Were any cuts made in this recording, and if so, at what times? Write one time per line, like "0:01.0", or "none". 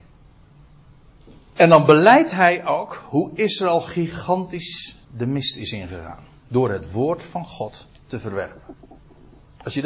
0:05.0